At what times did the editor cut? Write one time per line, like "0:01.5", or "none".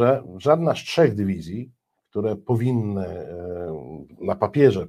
none